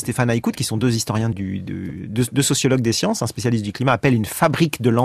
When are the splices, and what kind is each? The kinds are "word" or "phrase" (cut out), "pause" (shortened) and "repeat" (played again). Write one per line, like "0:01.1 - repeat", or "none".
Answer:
0:01.3 - word